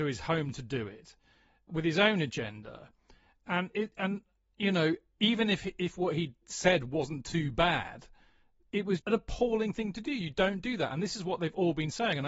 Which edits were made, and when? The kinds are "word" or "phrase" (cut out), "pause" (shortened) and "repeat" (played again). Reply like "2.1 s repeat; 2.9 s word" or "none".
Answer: 1.7 s word; 9.0 s word

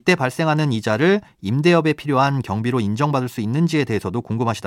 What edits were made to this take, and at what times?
none

